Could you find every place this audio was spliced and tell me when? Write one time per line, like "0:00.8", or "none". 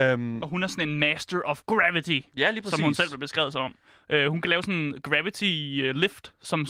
none